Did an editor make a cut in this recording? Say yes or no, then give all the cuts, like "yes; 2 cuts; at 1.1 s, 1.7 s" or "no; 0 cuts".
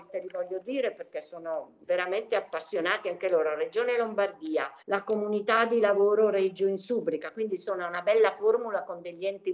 yes; 2 cuts; at 1.8 s, 4.8 s